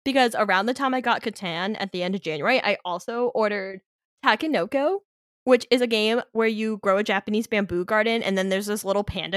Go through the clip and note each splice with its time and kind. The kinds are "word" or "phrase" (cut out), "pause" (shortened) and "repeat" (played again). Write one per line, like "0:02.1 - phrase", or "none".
none